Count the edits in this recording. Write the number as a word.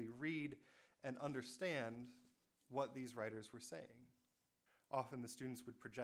two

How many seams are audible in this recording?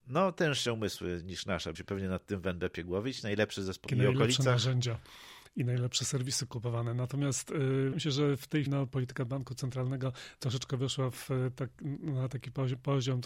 four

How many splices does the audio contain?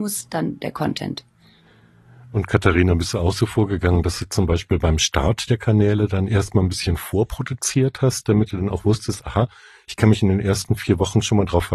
zero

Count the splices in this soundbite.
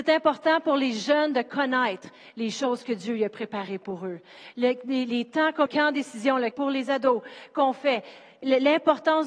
two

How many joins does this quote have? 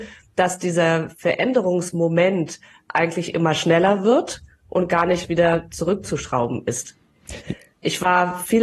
zero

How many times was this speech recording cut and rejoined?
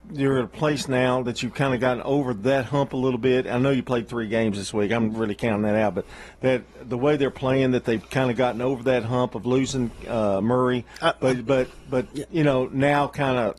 zero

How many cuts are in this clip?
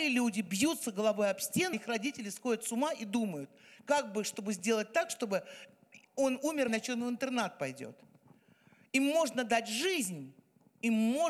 two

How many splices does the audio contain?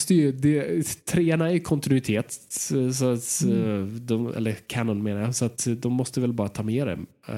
zero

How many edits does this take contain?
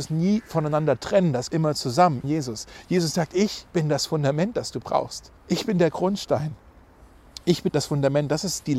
four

